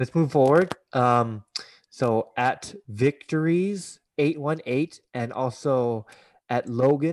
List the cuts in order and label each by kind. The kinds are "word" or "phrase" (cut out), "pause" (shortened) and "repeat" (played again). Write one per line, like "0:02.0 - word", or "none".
none

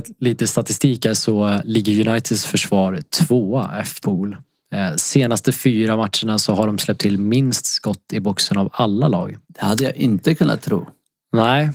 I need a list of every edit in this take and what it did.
0:04.0 - word
0:09.4 - pause

